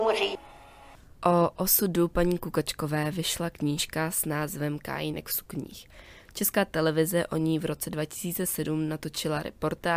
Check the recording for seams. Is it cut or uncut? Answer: cut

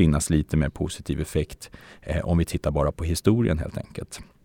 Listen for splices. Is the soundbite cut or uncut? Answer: uncut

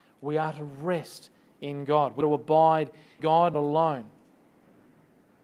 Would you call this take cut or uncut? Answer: cut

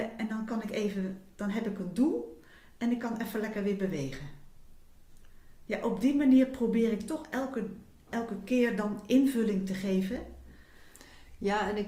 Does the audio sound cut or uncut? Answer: uncut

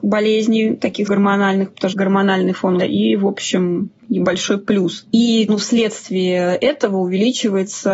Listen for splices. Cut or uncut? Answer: cut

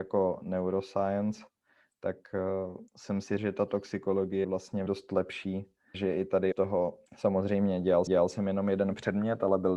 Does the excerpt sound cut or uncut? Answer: cut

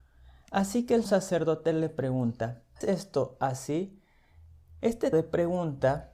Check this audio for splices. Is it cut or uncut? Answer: cut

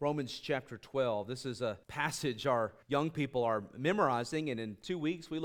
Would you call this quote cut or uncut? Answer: cut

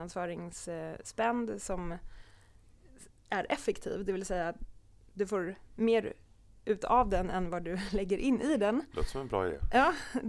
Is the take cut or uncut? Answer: uncut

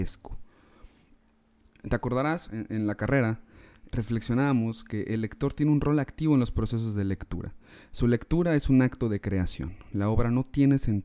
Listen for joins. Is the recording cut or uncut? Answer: cut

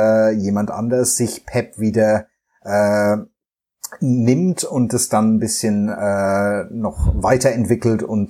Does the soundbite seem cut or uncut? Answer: uncut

